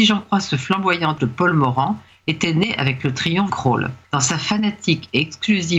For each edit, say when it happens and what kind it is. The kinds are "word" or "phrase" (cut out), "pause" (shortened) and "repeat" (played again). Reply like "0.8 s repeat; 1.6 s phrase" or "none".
1.2 s word; 3.5 s word; 4.0 s pause